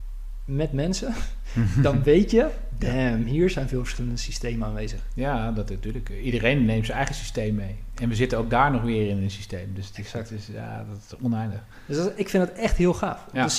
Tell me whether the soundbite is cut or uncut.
uncut